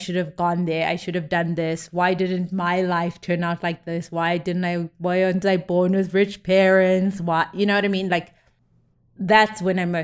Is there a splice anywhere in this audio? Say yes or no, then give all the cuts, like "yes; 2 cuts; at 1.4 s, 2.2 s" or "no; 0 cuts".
no; 0 cuts